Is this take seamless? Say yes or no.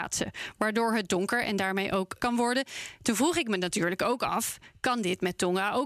no